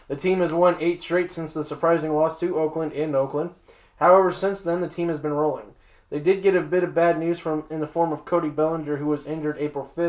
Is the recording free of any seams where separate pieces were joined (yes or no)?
yes